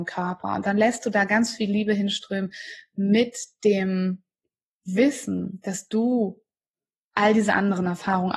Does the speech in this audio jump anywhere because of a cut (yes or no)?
no